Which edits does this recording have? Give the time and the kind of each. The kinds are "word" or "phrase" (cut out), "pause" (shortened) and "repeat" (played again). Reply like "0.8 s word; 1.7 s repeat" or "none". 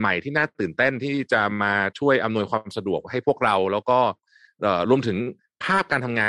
none